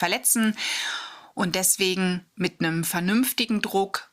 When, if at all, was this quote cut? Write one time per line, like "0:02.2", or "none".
0:02.3